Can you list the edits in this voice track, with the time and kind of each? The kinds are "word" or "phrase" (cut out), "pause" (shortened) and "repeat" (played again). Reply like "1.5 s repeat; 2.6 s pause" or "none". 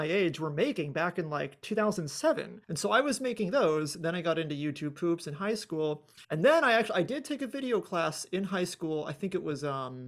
2.6 s pause; 6.2 s pause